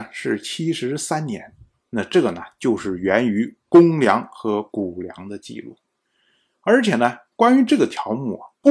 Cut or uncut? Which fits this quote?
uncut